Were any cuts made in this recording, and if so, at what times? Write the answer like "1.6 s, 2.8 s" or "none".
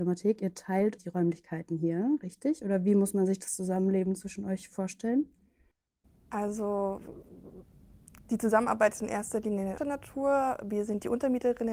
1.0 s, 9.8 s